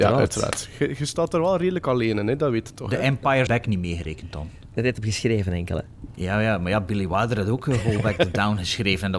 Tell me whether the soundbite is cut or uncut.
cut